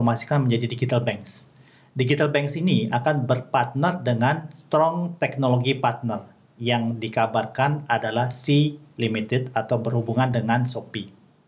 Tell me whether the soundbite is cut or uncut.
uncut